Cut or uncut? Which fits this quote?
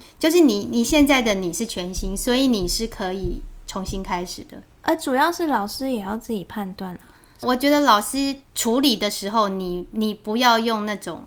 cut